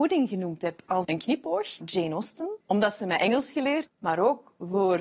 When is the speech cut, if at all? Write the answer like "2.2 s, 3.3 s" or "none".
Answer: 1.0 s, 1.8 s, 2.6 s, 3.9 s